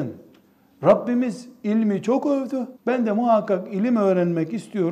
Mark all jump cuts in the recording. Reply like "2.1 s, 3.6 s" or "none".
2.8 s